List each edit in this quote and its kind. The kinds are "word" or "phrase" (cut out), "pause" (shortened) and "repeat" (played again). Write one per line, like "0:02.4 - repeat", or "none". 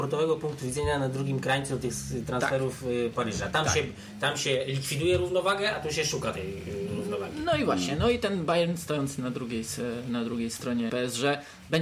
0:10.9 - word